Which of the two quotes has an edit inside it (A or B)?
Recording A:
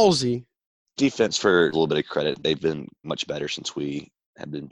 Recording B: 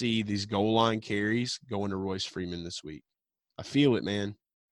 A